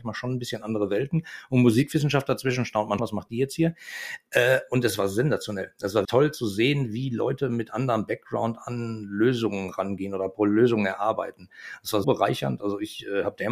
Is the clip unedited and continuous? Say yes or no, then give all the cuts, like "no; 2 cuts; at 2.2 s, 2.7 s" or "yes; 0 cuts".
no; 3 cuts; at 3.0 s, 6.0 s, 12.0 s